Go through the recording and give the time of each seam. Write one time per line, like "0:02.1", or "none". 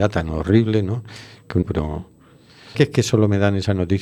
0:01.6
0:02.7